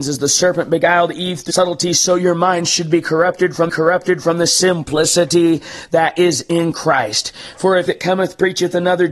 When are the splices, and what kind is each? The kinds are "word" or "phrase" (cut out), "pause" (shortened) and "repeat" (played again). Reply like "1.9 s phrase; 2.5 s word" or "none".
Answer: 1.5 s word; 3.7 s repeat; 7.9 s word